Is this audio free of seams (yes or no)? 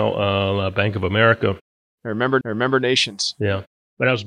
no